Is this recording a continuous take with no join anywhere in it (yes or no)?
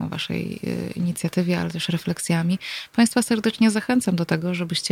yes